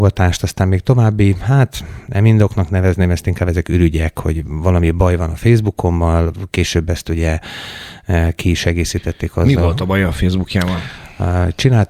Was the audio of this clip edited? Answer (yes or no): no